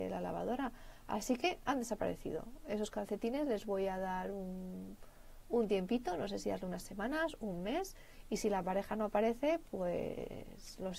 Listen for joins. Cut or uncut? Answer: uncut